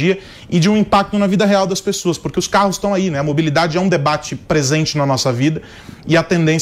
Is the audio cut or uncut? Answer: uncut